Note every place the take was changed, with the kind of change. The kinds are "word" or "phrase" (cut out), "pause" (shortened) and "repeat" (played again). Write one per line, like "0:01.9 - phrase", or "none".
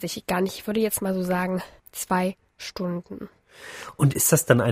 0:01.8 - pause